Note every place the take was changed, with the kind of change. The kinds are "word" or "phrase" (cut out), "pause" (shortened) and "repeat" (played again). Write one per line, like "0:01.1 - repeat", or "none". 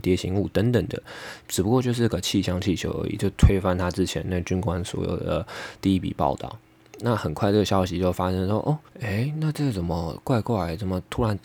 0:08.9 - pause